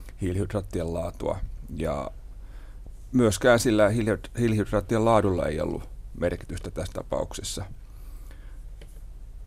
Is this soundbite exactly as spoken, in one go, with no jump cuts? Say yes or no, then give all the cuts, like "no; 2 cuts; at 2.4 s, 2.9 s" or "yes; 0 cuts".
yes; 0 cuts